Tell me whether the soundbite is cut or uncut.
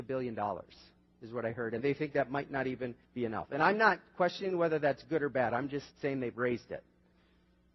cut